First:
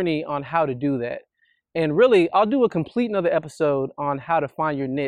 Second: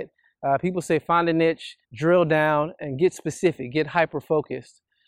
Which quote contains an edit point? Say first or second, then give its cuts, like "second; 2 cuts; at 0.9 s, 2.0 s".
second; 1 cut; at 1.8 s